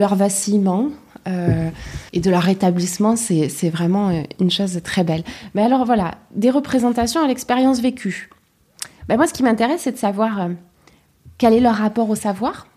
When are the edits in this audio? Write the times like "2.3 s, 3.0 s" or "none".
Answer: 2.1 s